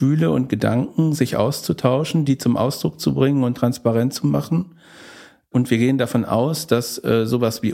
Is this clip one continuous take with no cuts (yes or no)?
yes